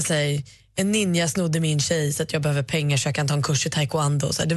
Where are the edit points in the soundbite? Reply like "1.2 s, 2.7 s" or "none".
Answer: none